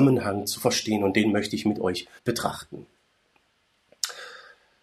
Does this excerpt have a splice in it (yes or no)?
yes